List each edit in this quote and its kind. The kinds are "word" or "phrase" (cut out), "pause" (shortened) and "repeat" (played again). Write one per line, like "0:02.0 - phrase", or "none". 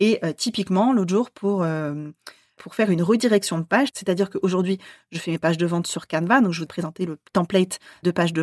0:06.7 - word